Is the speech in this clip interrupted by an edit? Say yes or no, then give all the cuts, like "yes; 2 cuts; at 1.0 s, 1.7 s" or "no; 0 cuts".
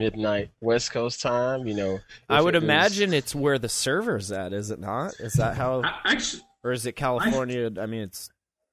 no; 0 cuts